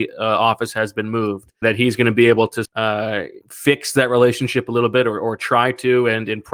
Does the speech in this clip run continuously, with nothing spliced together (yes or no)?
no